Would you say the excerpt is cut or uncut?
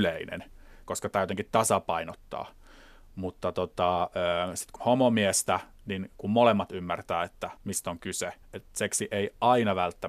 cut